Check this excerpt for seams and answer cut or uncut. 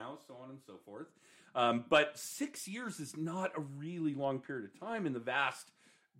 uncut